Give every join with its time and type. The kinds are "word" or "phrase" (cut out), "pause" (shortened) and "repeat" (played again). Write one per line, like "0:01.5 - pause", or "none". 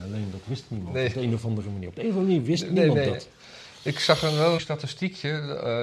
0:04.6 - phrase

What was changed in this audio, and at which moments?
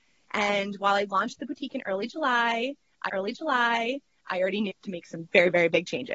0:03.1 - repeat
0:04.7 - phrase

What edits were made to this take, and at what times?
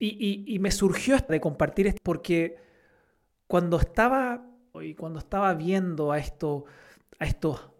0:01.3 - word
0:02.0 - word
0:04.7 - word

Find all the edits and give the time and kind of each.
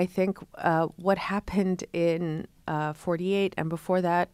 0:02.6 - pause

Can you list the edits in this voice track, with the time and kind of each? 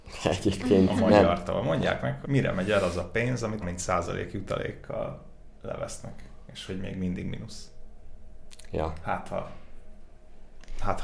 0:02.2 - word
0:03.6 - word
0:05.5 - pause
0:06.7 - word

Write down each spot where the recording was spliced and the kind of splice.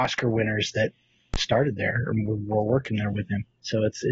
none

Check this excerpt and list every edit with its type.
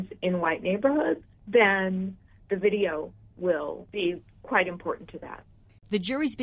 none

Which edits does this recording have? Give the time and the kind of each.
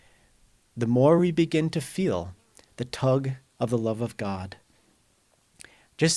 none

